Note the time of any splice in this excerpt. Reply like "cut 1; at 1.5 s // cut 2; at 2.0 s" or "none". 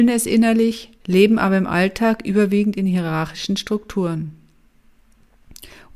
cut 1; at 1.0 s